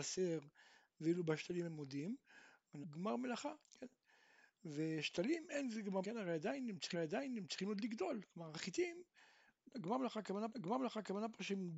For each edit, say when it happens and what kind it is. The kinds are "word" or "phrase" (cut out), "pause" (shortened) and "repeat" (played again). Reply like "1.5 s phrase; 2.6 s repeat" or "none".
2.8 s phrase; 3.6 s pause; 6.0 s word; 6.9 s repeat; 10.5 s repeat